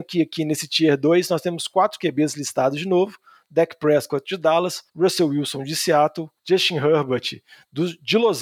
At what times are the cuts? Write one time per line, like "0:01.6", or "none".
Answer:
0:04.9
0:06.4